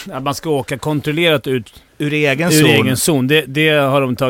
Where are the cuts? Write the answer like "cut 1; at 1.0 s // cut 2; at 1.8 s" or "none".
cut 1; at 1.9 s